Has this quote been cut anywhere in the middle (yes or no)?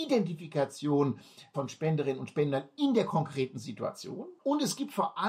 no